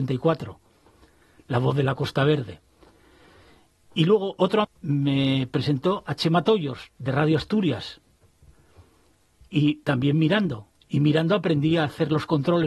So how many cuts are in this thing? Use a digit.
1